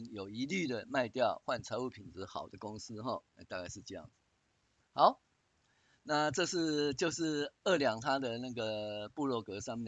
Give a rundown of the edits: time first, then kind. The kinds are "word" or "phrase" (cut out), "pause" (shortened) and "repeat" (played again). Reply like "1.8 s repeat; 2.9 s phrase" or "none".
none